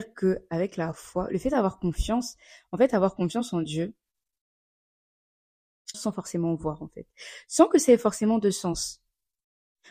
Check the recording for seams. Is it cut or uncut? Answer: cut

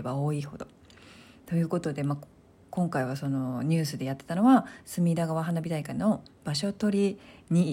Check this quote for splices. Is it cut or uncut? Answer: uncut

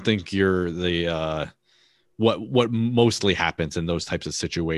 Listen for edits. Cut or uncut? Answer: uncut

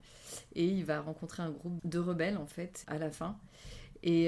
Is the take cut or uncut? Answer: cut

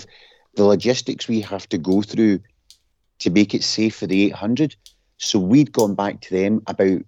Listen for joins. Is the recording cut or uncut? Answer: uncut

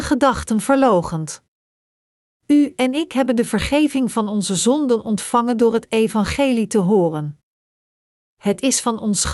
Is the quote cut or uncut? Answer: uncut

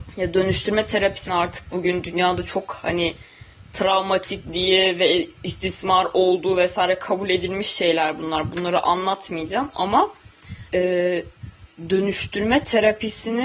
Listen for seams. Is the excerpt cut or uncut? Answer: cut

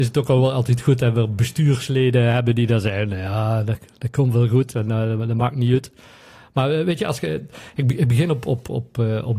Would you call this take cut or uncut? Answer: uncut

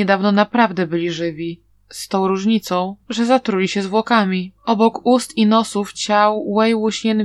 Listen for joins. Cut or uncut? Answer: cut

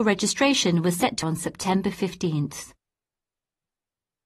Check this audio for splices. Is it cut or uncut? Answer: cut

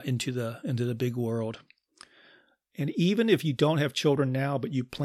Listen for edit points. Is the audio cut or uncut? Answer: uncut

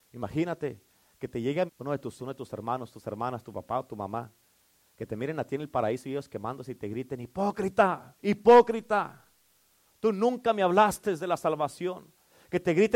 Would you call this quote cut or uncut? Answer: cut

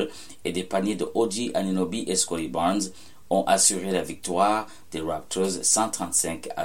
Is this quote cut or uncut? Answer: uncut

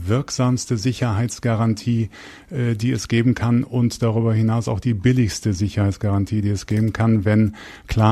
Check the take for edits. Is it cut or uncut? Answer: uncut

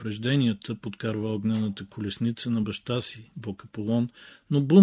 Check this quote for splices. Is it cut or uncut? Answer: uncut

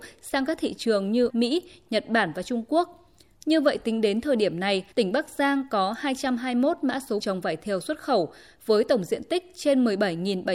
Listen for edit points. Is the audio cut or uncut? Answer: cut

